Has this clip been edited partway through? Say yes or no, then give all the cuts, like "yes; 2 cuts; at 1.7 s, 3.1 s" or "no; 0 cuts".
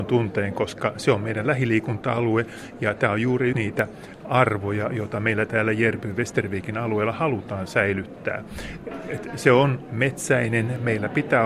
yes; 1 cut; at 3.5 s